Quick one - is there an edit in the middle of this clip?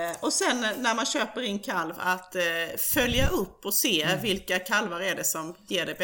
no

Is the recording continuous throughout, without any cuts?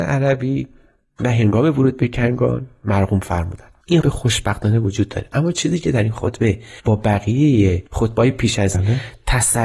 no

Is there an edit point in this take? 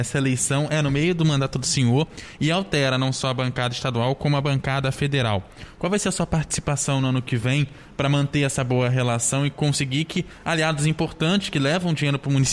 no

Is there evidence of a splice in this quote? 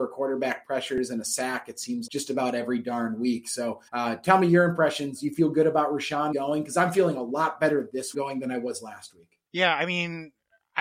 yes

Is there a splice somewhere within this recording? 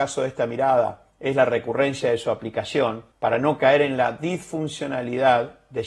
yes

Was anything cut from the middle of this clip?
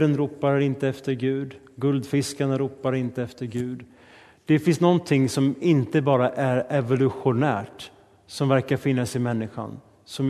no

